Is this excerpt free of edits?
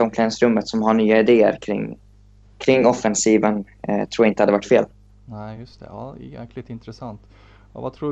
yes; 0 cuts

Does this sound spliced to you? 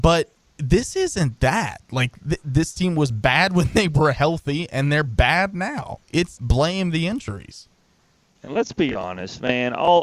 yes; 1 cut; at 6.4 s

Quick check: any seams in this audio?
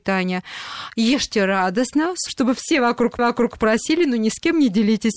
yes; 2 cuts; at 2.3 s, 3.2 s

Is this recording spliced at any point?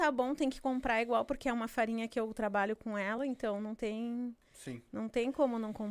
no; 0 cuts

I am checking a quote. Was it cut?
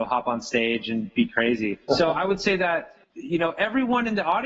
yes; 2 cuts; at 1.8 s, 3.0 s

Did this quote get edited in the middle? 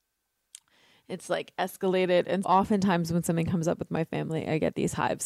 yes; 1 cut; at 2.4 s

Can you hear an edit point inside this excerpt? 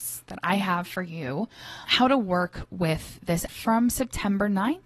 yes; 2 cuts; at 1.8 s, 3.5 s

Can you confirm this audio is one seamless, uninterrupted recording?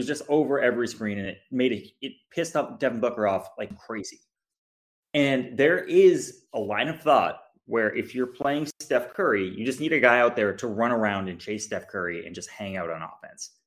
yes; 0 cuts

